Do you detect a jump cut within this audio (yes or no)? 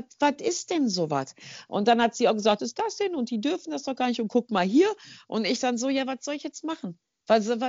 yes